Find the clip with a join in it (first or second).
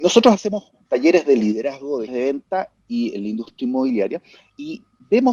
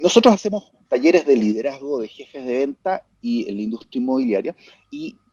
first